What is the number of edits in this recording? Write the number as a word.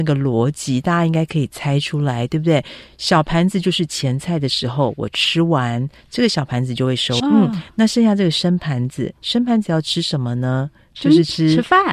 one